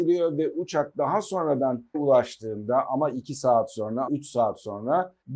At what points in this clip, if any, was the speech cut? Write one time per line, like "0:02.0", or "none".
0:01.9
0:04.1